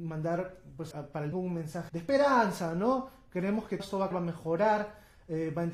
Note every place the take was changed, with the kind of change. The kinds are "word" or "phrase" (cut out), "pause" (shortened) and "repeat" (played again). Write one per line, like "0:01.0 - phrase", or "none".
0:00.9 - word
0:01.3 - word
0:01.9 - word
0:03.8 - word
0:04.1 - word